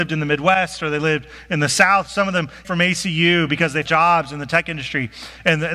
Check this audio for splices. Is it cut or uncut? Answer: cut